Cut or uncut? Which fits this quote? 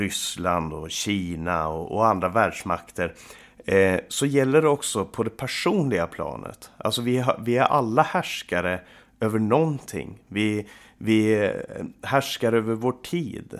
uncut